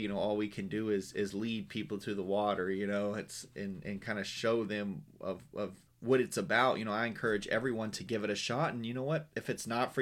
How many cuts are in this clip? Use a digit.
1